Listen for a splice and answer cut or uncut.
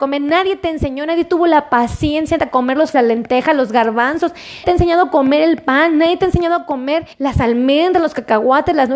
cut